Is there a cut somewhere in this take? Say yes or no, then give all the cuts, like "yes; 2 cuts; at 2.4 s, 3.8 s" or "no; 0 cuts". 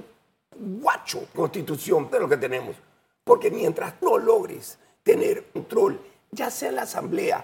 yes; 4 cuts; at 1.3 s, 2.1 s, 4.0 s, 5.6 s